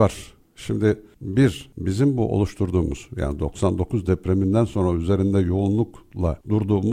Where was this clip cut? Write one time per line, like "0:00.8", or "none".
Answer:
none